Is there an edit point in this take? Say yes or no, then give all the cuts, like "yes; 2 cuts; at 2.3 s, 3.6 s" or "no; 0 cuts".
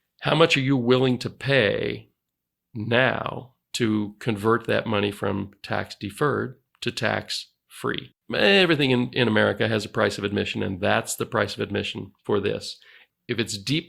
yes; 4 cuts; at 3.6 s, 6.7 s, 8.2 s, 12.2 s